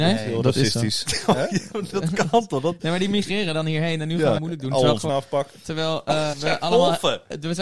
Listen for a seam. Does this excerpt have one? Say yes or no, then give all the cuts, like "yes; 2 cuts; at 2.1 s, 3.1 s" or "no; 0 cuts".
yes; 4 cuts; at 1.9 s, 4.4 s, 5.1 s, 6.3 s